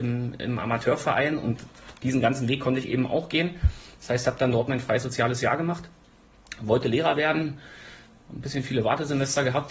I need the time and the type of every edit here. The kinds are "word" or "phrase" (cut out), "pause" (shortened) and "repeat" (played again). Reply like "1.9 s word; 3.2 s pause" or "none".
none